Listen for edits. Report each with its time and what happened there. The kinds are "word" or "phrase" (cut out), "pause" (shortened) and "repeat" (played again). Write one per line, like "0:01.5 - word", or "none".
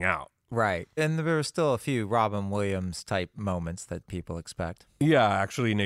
0:00.9 - pause